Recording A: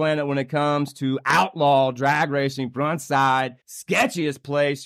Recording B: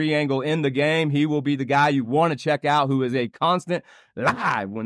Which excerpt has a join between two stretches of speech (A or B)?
A